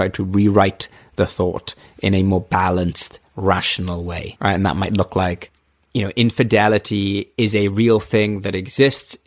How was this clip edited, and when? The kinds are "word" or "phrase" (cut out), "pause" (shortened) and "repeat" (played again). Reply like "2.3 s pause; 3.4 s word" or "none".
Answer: none